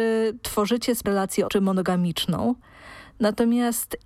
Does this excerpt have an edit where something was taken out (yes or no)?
yes